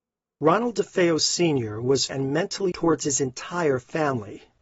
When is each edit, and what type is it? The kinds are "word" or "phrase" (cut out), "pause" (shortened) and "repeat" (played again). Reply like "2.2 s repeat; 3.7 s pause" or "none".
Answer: 2.1 s phrase; 2.7 s word